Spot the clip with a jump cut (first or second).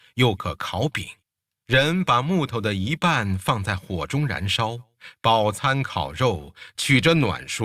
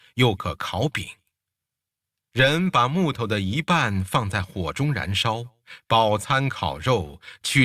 first